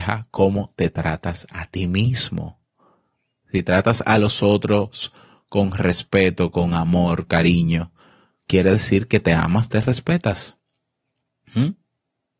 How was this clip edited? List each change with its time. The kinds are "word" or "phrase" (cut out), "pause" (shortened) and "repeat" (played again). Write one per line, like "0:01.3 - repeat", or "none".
0:07.3 - word